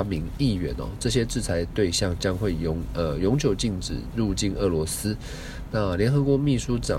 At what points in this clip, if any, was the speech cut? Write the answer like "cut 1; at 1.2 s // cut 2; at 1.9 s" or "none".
none